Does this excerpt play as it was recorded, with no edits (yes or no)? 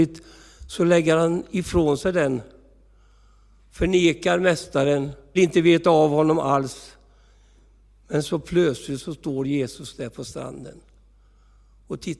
no